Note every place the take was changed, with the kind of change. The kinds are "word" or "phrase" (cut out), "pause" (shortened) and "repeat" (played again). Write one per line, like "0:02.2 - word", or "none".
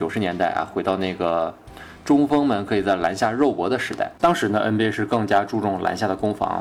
0:04.2 - pause